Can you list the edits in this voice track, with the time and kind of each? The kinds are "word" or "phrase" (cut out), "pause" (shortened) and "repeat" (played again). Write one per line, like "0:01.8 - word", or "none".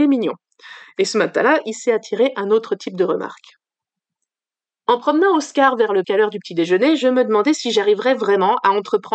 0:06.0 - word